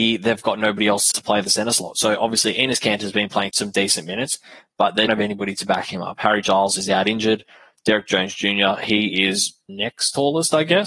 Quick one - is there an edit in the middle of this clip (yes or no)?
yes